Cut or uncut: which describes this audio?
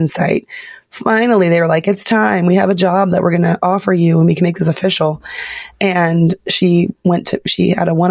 uncut